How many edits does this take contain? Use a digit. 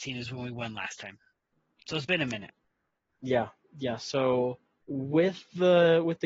1